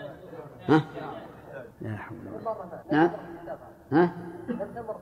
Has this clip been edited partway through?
yes; 2 cuts; at 1.7 s, 2.8 s

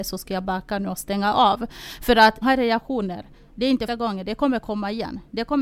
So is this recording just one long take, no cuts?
no; 2 cuts; at 2.4 s, 3.9 s

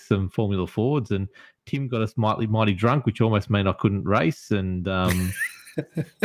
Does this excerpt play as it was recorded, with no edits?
yes; 0 cuts

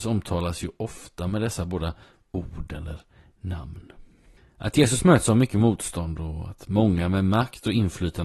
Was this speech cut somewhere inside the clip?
no; 0 cuts

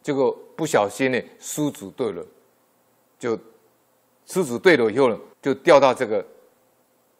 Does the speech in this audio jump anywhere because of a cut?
yes; 1 cut; at 5.3 s

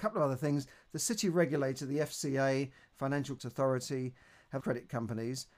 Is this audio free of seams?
no; 2 cuts; at 3.4 s, 4.6 s

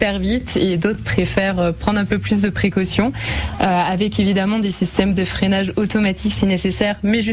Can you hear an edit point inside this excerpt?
no; 0 cuts

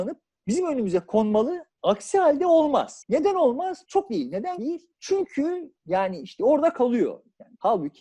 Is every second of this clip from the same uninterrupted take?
no; 4 cuts; at 1.7 s, 4.1 s, 4.6 s, 5.8 s

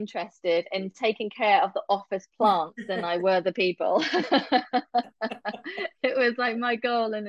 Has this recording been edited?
no; 0 cuts

